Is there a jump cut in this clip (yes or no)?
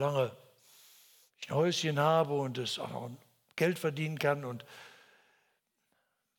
no